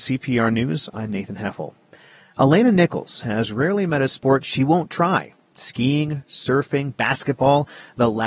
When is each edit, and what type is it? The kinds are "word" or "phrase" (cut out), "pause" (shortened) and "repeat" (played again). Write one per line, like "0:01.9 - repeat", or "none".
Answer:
none